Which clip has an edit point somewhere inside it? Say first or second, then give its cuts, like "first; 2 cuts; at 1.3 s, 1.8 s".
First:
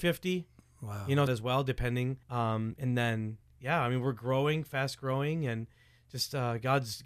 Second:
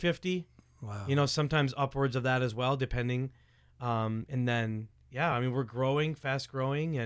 first; 2 cuts; at 1.3 s, 2.2 s